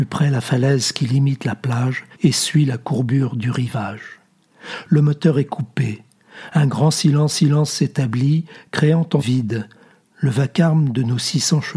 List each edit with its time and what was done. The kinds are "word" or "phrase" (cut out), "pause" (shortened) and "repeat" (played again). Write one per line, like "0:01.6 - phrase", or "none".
0:02.1 - pause
0:07.3 - repeat
0:09.2 - phrase